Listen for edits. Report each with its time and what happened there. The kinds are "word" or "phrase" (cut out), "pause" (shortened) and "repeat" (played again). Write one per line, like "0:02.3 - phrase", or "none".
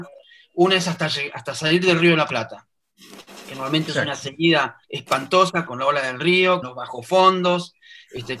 0:04.8 - pause
0:06.6 - word